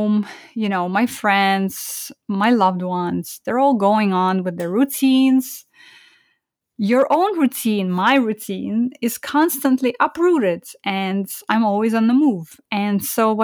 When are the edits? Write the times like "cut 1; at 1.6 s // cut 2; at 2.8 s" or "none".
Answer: none